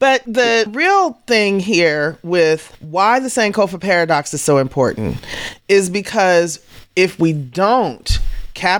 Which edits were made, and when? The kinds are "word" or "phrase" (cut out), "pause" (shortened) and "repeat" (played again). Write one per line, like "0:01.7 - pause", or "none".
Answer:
none